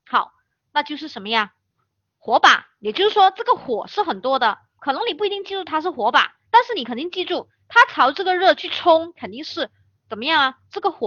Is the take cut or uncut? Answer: cut